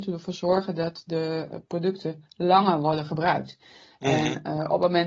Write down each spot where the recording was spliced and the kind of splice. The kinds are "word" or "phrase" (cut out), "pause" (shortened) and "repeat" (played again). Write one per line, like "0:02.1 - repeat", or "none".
none